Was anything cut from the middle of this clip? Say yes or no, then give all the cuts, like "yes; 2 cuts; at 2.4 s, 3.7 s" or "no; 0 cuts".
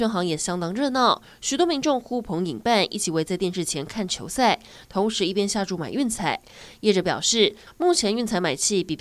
no; 0 cuts